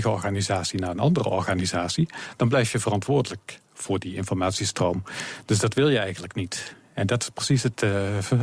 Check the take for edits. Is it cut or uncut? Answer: uncut